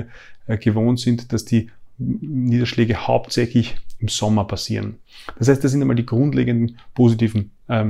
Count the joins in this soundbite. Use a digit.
0